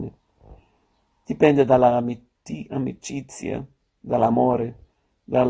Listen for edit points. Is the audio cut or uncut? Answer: uncut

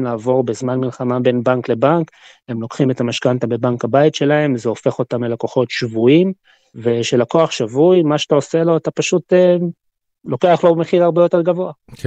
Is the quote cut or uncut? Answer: uncut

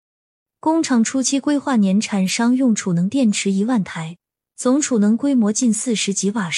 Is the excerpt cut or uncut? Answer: uncut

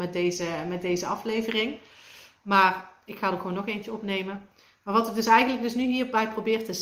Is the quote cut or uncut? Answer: uncut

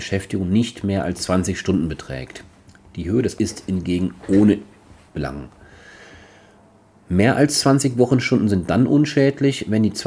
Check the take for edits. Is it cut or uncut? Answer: cut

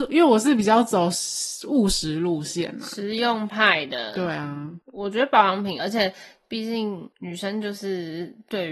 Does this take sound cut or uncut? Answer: cut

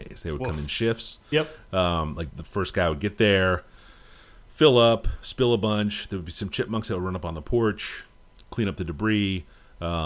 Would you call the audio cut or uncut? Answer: cut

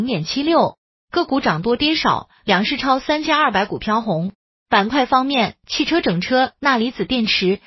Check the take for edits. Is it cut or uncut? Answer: uncut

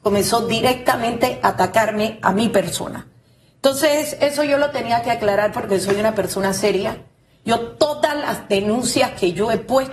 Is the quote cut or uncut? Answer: uncut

